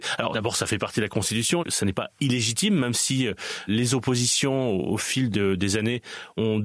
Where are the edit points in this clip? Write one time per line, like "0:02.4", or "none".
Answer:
0:01.6

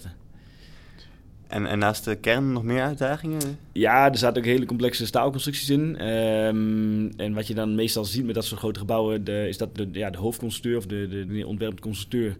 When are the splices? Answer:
0:09.8
0:11.3

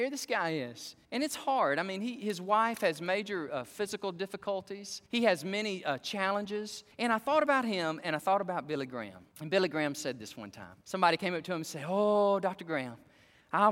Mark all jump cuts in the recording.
0:01.0
0:05.1
0:06.9
0:09.3
0:10.8

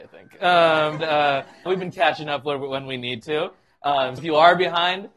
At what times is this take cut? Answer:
0:01.0
0:01.7
0:04.2

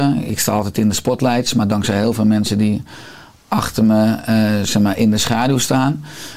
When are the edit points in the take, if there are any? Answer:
none

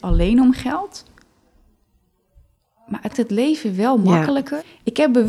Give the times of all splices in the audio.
0:03.1

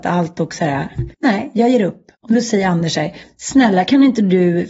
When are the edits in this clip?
0:01.1
0:02.1

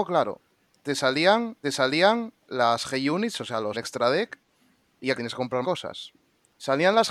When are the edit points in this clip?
0:01.6
0:03.7
0:05.2
0:05.6

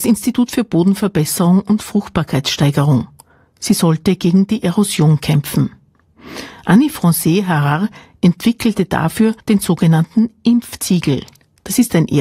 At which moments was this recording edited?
0:09.4

